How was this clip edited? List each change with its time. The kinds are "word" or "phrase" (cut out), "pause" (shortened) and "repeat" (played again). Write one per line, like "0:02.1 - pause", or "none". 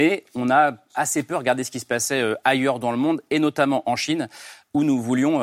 none